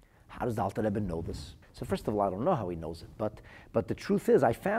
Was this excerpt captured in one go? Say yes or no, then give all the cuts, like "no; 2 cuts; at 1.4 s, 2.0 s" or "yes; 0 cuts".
no; 1 cut; at 1.6 s